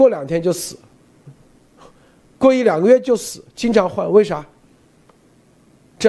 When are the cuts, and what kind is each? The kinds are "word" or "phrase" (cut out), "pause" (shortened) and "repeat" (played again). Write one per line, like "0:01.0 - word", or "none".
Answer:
none